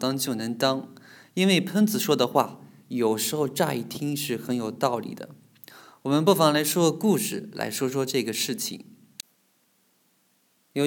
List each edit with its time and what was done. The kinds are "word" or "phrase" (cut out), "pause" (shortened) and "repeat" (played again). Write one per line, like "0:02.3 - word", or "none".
none